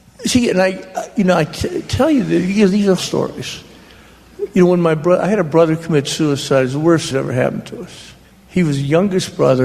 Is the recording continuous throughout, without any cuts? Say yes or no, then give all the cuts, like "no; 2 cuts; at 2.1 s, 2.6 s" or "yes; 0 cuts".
no; 3 cuts; at 3.0 s, 7.1 s, 8.2 s